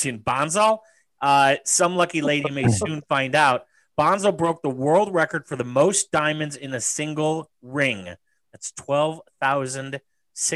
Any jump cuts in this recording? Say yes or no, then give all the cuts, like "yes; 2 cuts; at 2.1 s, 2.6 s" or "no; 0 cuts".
no; 0 cuts